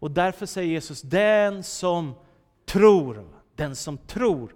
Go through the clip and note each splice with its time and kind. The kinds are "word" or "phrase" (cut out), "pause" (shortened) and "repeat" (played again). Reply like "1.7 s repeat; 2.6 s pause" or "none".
none